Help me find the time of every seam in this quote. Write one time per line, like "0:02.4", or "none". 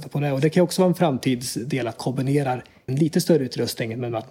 0:02.0
0:02.9